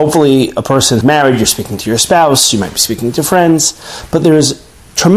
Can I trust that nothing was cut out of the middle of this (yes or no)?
no